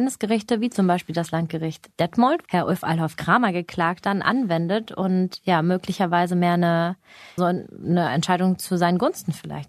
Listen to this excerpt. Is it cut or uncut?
cut